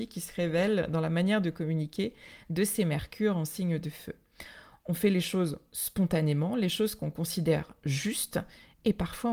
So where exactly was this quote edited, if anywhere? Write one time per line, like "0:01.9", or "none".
none